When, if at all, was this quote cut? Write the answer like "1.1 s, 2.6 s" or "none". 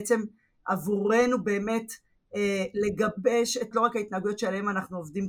3.7 s